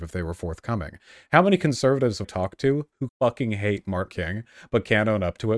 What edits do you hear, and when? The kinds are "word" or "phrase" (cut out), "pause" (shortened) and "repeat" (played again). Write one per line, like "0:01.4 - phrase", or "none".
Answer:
0:02.2 - word
0:03.1 - word
0:04.1 - word